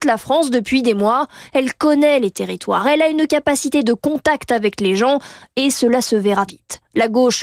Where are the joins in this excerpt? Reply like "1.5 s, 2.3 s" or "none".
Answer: 6.5 s